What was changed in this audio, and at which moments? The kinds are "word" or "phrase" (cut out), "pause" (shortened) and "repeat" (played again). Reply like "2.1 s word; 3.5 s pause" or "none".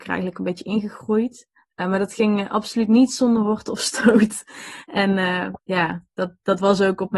1.6 s pause; 5.6 s pause